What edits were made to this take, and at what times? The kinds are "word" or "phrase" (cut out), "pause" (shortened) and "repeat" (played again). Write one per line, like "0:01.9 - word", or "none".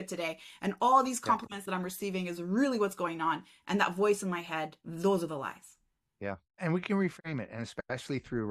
none